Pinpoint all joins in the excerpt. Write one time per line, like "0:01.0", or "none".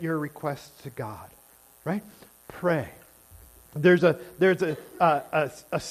none